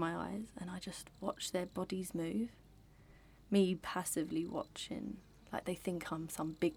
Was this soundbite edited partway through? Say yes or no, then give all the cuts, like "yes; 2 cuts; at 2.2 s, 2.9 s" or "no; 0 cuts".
no; 0 cuts